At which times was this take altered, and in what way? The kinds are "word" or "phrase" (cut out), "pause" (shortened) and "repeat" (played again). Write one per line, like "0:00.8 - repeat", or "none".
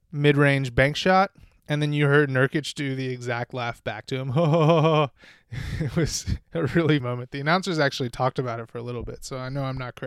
0:07.0 - word